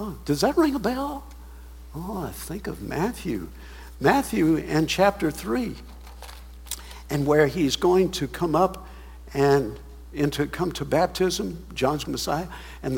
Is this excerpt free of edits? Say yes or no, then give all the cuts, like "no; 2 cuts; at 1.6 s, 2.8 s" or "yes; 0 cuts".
no; 1 cut; at 12.0 s